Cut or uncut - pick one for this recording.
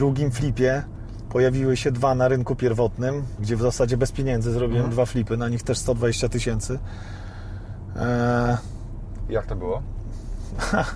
uncut